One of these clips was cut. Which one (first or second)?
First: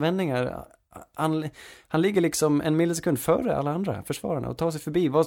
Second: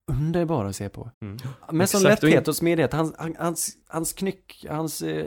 second